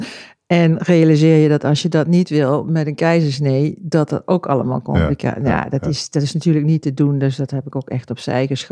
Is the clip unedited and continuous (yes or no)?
yes